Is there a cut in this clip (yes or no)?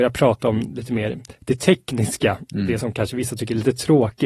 no